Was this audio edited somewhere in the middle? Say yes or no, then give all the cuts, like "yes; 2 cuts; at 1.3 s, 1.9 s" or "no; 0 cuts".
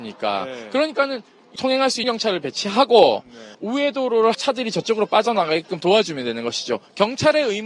yes; 4 cuts; at 1.6 s, 2.0 s, 3.5 s, 4.3 s